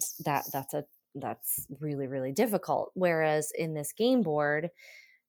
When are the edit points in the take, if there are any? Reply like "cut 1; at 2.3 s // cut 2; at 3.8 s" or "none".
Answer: none